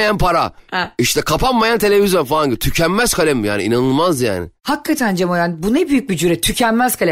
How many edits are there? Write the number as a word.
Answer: zero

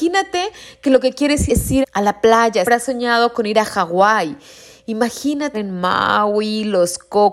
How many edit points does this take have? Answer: four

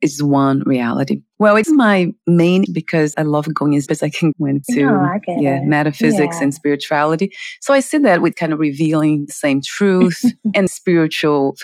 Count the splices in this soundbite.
eight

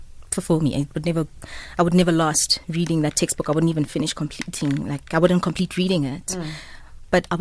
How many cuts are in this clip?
zero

